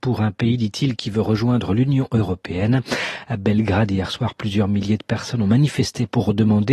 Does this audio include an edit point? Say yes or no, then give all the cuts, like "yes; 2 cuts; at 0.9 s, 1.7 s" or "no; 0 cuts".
no; 0 cuts